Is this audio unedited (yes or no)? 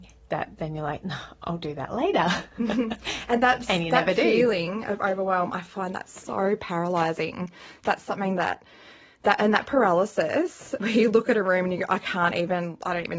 yes